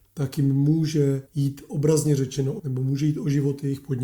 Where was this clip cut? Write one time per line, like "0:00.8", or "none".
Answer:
0:01.3
0:02.6